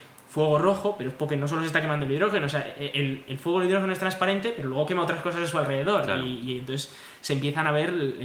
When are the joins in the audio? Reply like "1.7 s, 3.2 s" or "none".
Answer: none